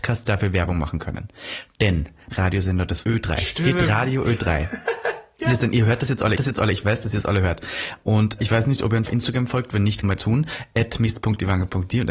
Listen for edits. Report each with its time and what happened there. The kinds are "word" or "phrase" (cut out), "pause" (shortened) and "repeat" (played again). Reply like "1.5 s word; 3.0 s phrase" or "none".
2.3 s word; 3.0 s word; 6.3 s repeat; 8.4 s word; 9.0 s word; 10.0 s word